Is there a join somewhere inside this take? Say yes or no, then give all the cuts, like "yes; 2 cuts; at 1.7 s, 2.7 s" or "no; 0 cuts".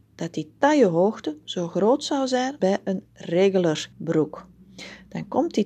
yes; 2 cuts; at 2.6 s, 3.9 s